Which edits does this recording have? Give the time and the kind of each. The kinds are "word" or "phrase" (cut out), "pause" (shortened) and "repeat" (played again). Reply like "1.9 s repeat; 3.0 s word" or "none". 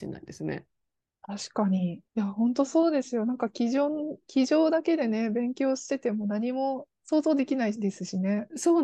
2.1 s pause; 7.0 s pause